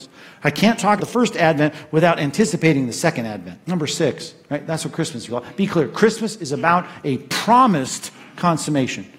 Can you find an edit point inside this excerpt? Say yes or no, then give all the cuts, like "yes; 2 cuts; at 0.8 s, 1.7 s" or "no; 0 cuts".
yes; 3 cuts; at 1.0 s, 3.6 s, 5.3 s